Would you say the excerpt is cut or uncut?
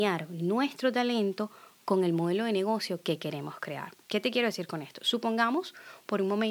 cut